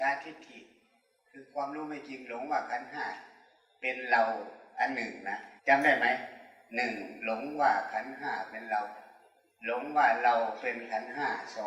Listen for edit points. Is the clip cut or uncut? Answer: cut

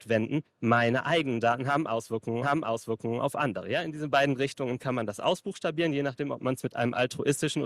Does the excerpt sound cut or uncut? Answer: cut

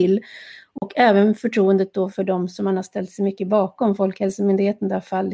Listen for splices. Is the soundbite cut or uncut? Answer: uncut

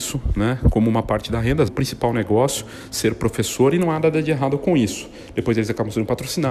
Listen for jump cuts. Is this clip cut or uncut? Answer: cut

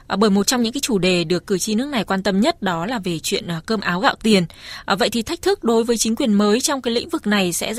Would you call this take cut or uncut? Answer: uncut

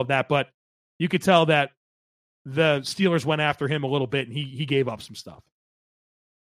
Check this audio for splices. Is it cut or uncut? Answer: uncut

